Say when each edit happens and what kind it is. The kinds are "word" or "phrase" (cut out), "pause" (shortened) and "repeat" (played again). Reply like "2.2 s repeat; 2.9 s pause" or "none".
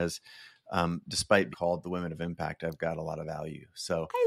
1.5 s word